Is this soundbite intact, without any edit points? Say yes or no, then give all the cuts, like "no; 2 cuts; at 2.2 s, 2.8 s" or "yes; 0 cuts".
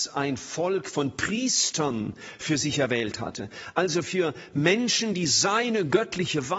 yes; 0 cuts